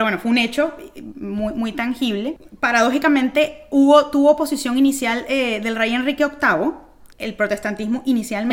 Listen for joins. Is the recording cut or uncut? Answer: cut